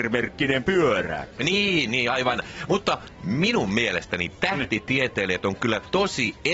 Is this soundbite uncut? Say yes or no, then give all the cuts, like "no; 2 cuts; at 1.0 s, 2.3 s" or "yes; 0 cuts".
yes; 0 cuts